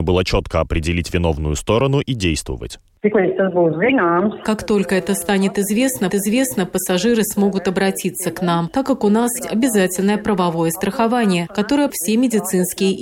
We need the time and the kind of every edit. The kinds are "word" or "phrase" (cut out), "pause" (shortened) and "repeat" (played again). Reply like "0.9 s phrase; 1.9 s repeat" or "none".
6.1 s repeat; 9.4 s word; 11.9 s phrase